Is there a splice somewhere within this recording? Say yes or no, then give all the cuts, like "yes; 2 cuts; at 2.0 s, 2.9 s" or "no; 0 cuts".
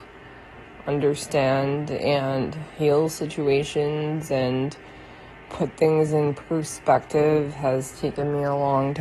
yes; 1 cut; at 2.7 s